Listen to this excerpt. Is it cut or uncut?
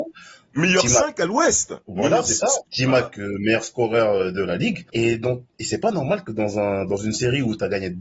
cut